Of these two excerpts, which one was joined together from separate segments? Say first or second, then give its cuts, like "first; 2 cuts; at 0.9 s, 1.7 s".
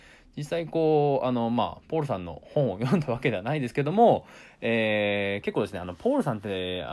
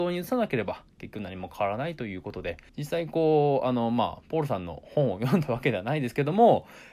second; 1 cut; at 2.7 s